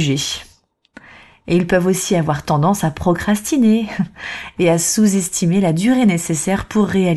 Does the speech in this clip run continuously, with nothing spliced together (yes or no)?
yes